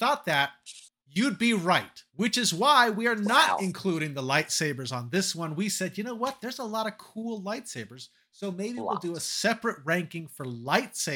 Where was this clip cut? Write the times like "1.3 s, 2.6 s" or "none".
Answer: 1.0 s, 2.1 s